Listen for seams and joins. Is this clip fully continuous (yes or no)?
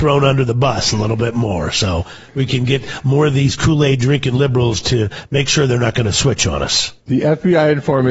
no